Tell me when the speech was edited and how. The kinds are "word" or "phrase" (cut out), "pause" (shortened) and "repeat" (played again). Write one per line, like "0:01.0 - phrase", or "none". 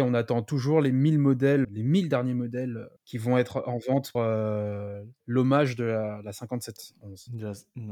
0:01.6 - word
0:03.0 - pause
0:04.1 - word
0:05.2 - pause